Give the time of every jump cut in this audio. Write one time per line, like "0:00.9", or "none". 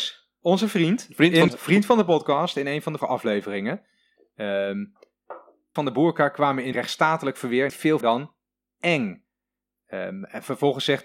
0:01.5
0:03.0
0:05.8
0:06.7
0:07.7
0:08.0